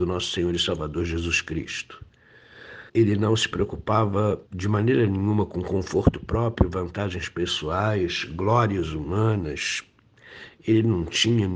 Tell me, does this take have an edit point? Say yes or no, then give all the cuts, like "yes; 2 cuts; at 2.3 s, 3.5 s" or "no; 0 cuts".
yes; 2 cuts; at 2.9 s, 4.5 s